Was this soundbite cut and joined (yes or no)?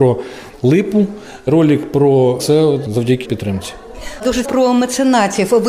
yes